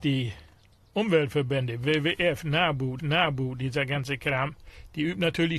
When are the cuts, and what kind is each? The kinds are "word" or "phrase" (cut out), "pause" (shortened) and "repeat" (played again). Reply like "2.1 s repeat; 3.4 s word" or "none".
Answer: 3.0 s repeat

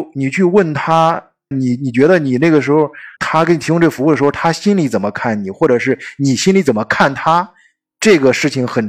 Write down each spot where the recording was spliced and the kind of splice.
1.5 s word; 3.2 s word

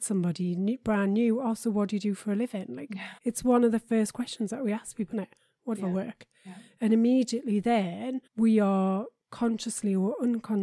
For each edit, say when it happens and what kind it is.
3.2 s pause; 5.1 s word; 5.7 s phrase; 8.3 s pause

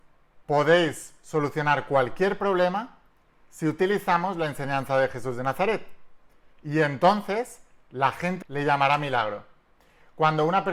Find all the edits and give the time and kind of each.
8.4 s phrase

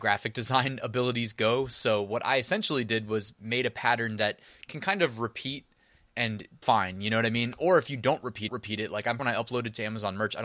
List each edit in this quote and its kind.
6.6 s word; 8.5 s repeat; 9.2 s phrase

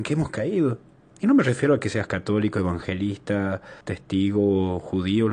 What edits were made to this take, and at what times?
3.8 s pause

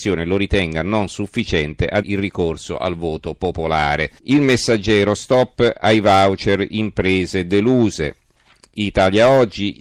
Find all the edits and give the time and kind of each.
2.0 s word; 4.2 s pause

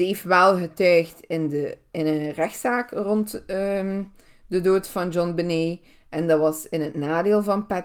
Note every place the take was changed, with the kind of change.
none

